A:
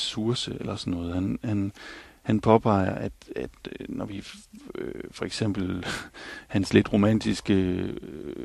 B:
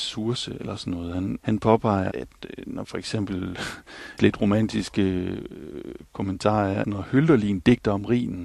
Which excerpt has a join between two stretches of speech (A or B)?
B